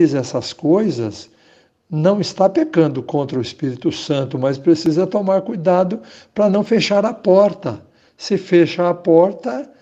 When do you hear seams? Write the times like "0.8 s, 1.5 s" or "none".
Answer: none